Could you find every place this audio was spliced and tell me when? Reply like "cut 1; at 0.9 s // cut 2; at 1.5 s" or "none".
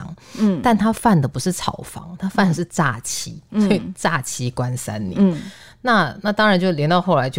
none